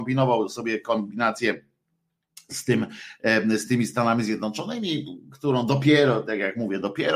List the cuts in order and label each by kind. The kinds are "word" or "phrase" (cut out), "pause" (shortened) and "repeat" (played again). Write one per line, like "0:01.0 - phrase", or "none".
none